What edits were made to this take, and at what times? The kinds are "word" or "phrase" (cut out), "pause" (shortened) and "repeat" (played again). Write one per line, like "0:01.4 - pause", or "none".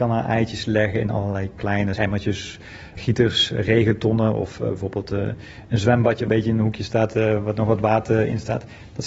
0:02.0 - phrase
0:03.0 - word
0:06.3 - word